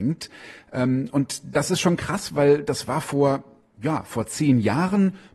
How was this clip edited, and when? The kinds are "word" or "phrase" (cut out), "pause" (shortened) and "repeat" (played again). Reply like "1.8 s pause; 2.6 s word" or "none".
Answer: none